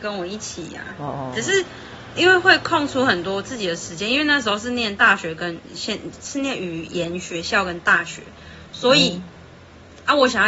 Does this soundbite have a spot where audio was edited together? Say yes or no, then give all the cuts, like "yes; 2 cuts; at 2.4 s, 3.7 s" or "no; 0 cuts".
no; 0 cuts